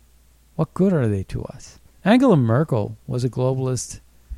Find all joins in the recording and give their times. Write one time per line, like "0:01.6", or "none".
0:01.8